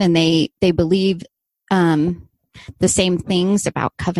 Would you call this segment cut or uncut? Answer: uncut